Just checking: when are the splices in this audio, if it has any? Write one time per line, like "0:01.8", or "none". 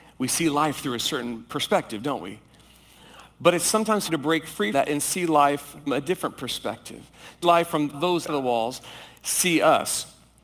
0:04.1
0:04.7
0:05.9
0:07.4
0:07.9
0:08.3